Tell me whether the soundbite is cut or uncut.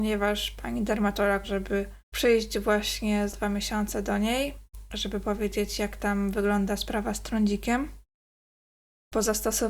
cut